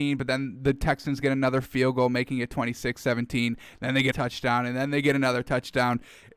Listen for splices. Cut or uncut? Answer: cut